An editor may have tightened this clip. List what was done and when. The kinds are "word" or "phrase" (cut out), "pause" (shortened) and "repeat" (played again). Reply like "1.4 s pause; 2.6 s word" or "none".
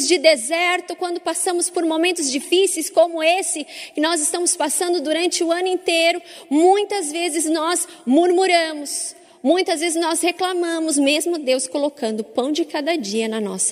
none